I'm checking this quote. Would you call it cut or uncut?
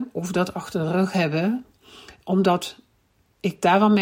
uncut